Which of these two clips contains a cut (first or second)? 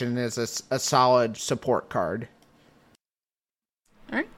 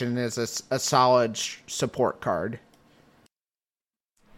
first